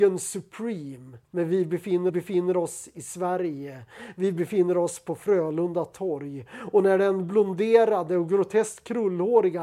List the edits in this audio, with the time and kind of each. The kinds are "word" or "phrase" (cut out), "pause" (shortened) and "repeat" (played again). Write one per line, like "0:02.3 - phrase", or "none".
0:01.2 - pause
0:02.1 - repeat